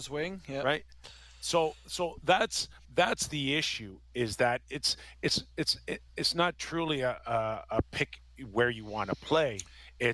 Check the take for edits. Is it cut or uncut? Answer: cut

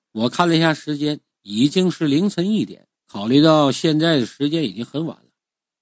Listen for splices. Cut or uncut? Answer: cut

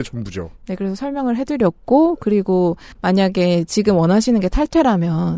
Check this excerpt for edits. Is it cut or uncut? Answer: cut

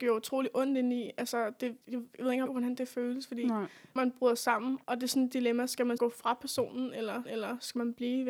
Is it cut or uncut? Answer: cut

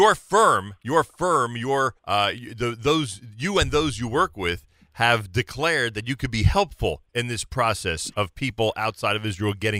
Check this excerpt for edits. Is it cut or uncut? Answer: cut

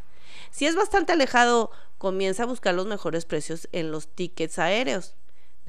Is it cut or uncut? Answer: uncut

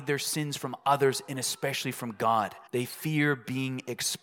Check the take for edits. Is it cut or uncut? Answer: cut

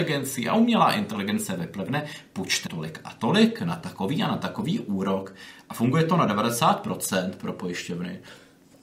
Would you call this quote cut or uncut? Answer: cut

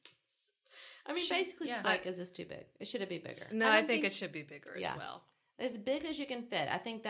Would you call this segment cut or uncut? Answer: uncut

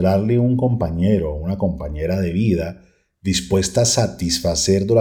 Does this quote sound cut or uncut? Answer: uncut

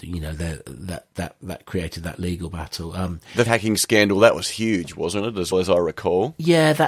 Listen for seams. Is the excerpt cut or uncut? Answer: cut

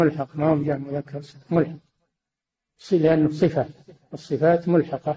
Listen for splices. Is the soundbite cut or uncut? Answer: uncut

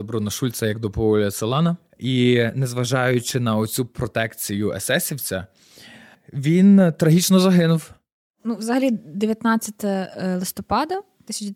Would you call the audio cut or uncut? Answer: uncut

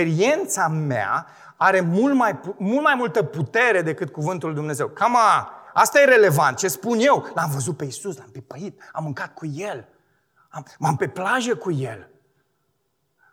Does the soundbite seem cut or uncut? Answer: cut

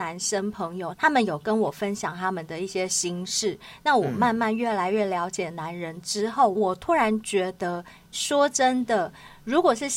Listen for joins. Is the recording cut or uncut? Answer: cut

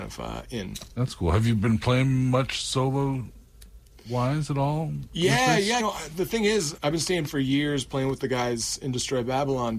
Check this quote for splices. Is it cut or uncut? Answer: cut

